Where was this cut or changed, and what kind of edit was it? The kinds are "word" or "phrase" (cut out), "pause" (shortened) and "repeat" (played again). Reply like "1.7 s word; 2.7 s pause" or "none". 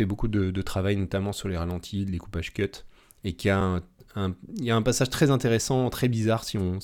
none